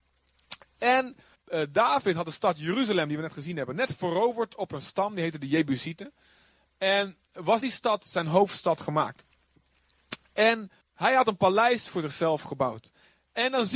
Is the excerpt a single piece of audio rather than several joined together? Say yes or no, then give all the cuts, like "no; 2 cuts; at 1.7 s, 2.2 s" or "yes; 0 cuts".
no; 3 cuts; at 1.3 s, 7.6 s, 10.8 s